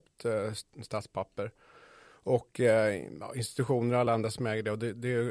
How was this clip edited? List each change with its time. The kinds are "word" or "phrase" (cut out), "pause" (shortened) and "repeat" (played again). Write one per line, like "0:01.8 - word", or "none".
none